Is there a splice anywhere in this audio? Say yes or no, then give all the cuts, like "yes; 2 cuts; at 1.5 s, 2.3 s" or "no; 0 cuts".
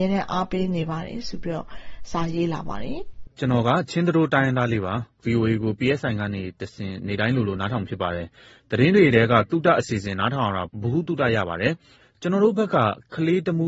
yes; 1 cut; at 3.3 s